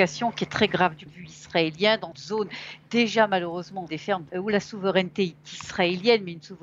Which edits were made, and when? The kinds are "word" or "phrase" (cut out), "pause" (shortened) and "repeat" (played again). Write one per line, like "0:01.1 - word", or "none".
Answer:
0:01.1 - word
0:02.1 - word
0:03.9 - word
0:04.3 - word

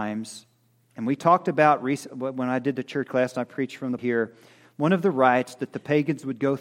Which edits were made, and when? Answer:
0:03.1 - word
0:04.0 - word

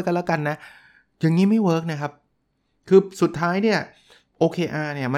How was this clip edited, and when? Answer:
none

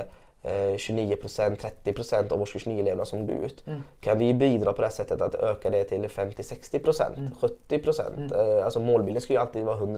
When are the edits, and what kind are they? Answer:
0:03.3 - word

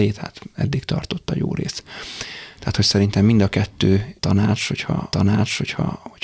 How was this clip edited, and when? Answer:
0:05.1 - repeat

